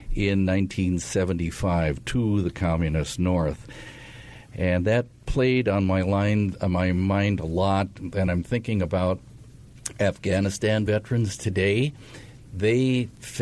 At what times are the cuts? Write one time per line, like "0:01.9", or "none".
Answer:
none

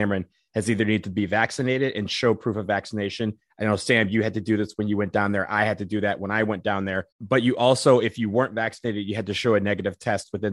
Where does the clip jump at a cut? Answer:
0:07.1

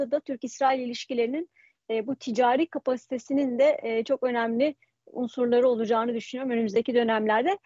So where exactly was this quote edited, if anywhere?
none

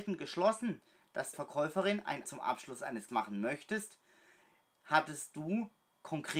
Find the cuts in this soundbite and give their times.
0:01.3
0:02.2
0:03.1

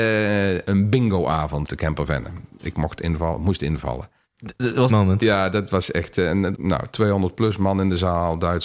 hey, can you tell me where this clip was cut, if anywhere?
0:01.7
0:04.9
0:06.5

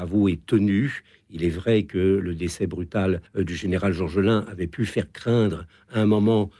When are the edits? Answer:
0:03.3

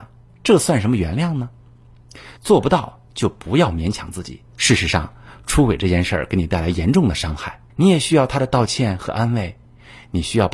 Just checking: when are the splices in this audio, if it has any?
0:02.4
0:04.5
0:07.7

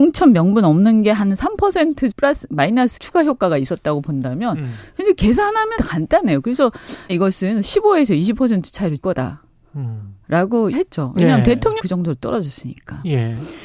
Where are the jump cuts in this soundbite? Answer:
0:02.1
0:03.0
0:05.8
0:07.1
0:09.0
0:10.7
0:11.8

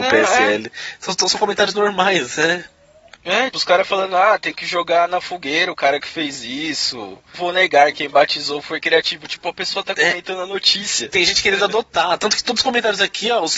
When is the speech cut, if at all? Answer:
0:03.5
0:07.3

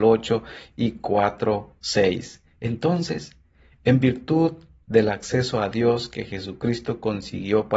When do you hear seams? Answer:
none

